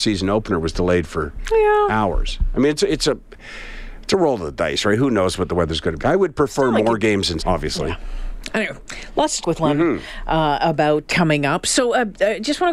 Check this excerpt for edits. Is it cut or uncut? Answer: cut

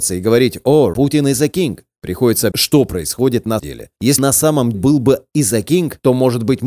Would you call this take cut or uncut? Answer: cut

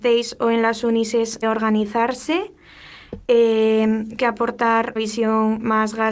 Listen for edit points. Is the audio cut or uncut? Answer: cut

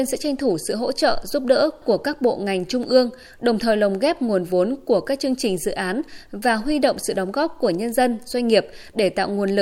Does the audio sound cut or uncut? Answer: uncut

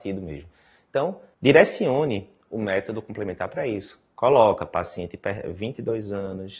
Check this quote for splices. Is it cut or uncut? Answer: cut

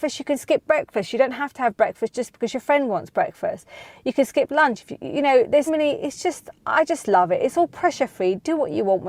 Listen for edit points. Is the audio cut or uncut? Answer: cut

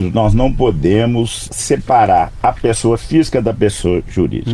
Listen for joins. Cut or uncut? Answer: uncut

